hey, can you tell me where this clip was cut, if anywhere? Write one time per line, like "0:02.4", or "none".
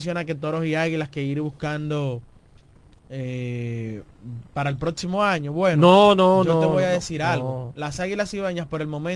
none

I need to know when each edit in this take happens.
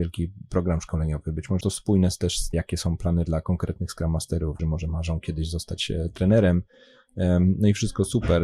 0:01.6
0:02.5
0:03.3
0:04.6

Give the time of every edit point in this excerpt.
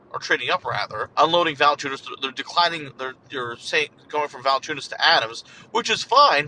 0:01.1
0:03.2

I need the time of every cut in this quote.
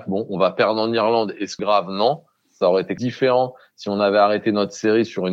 0:01.6
0:03.0

